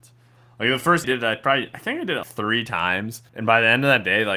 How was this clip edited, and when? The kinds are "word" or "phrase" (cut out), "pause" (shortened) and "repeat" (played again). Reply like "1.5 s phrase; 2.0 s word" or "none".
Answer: 1.0 s phrase; 2.2 s word; 3.3 s pause